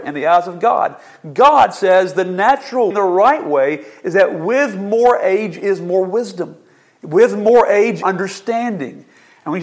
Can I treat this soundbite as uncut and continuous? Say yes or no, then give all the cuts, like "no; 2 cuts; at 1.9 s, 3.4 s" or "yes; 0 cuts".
no; 2 cuts; at 2.9 s, 8.0 s